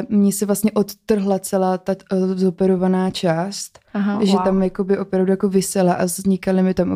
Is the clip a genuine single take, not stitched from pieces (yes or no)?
yes